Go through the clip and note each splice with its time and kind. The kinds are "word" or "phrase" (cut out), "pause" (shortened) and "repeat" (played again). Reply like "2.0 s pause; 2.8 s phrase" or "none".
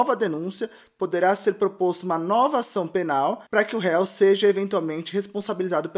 3.5 s pause